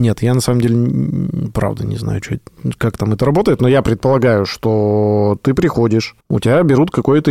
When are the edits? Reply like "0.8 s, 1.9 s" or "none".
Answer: 6.2 s